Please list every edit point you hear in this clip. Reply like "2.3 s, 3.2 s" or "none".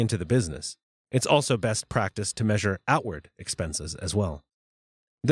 none